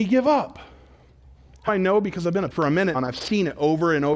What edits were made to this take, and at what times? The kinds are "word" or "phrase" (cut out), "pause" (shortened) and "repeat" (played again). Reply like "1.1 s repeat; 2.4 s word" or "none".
1.7 s word; 2.5 s word; 2.9 s word